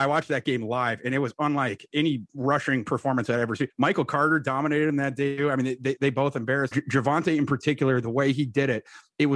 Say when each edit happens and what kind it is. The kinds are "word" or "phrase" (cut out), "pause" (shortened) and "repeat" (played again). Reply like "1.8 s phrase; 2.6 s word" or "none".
6.7 s phrase